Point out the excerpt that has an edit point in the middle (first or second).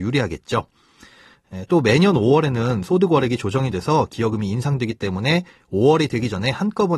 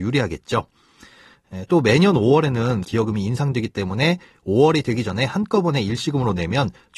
second